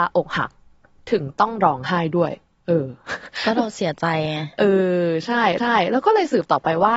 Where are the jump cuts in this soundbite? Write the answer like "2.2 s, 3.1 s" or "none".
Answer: 2.6 s, 5.6 s